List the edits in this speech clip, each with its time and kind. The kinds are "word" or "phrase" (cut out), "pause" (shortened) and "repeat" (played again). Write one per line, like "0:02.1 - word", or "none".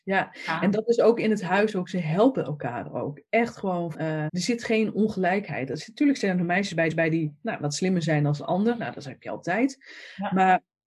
0:03.9 - word
0:04.3 - word
0:06.9 - repeat